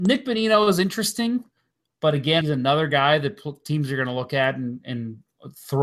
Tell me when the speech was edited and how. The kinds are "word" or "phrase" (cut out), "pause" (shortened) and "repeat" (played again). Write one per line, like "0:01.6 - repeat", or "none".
0:02.4 - phrase